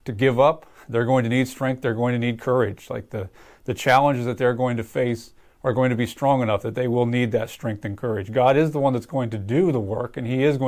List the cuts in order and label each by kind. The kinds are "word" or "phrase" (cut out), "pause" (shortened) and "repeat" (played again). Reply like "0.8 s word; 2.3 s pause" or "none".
none